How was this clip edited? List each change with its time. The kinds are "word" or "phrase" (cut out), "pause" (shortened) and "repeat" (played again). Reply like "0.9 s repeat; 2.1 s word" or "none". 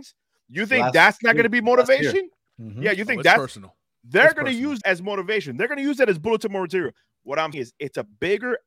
4.8 s word; 7.5 s word